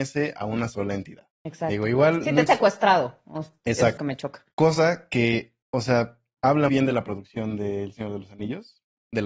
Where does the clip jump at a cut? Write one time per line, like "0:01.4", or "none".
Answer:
0:01.4
0:02.5
0:04.0
0:04.5
0:05.6
0:06.7